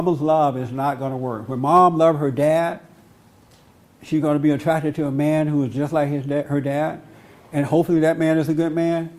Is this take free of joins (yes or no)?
yes